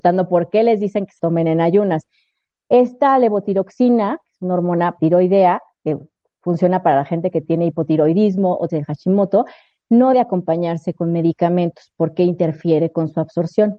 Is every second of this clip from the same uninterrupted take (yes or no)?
no